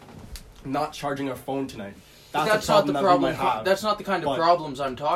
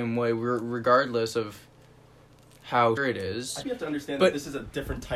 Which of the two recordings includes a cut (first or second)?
second